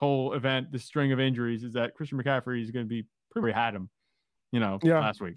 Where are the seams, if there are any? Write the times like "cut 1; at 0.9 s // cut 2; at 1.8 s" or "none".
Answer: cut 1; at 3.4 s